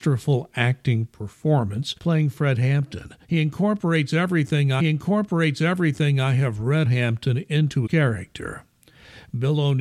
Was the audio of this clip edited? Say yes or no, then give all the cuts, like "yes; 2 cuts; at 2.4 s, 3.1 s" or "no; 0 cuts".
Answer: yes; 5 cuts; at 2.0 s, 3.2 s, 4.8 s, 6.8 s, 7.9 s